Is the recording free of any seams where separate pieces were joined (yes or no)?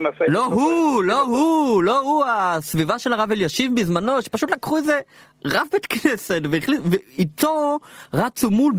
yes